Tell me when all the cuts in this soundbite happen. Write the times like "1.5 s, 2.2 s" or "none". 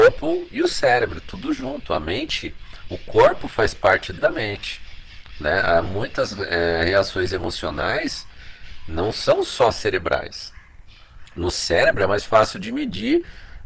4.2 s